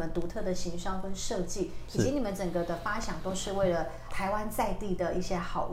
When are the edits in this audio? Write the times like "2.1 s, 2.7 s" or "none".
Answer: 4.1 s

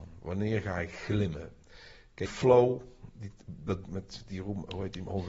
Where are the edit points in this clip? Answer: 2.3 s, 3.8 s

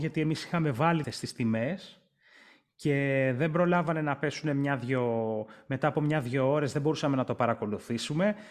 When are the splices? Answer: 1.0 s

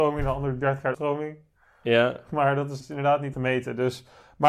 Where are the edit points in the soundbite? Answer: 0.9 s, 2.8 s, 3.3 s

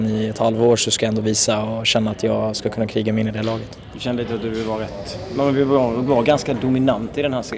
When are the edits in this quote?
none

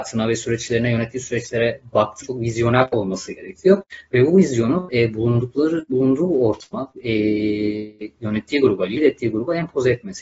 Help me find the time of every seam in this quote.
2.2 s

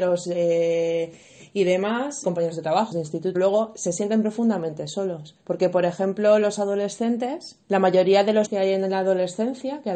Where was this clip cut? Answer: 2.2 s, 2.9 s, 3.3 s, 5.4 s, 7.6 s, 8.4 s

